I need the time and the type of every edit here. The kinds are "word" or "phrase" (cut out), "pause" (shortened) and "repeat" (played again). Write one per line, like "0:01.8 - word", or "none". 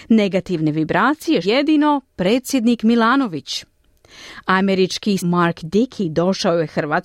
0:01.4 - word
0:05.2 - word

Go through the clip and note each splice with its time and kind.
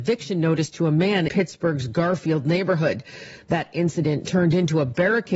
0:01.3 - word

